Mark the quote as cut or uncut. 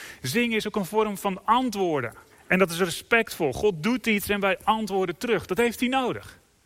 cut